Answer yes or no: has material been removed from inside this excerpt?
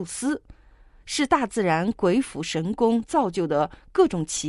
no